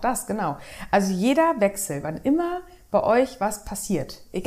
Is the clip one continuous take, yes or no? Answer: yes